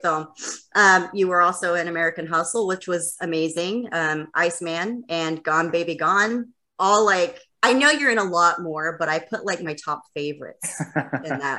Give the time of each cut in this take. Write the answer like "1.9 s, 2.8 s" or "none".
6.6 s, 7.5 s